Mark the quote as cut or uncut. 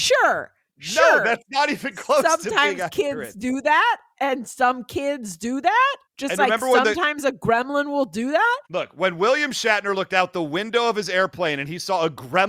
cut